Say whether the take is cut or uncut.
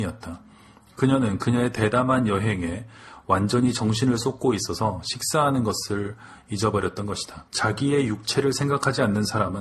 cut